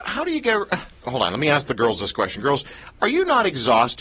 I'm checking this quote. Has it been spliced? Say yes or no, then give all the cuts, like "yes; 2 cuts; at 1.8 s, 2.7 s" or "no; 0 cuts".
no; 0 cuts